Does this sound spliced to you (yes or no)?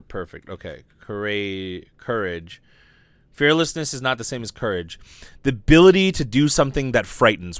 no